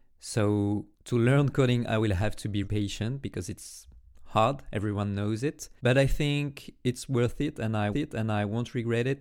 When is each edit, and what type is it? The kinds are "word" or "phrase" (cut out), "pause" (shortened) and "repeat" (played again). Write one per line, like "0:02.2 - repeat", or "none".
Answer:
0:00.9 - pause
0:02.6 - word
0:05.8 - pause
0:07.9 - repeat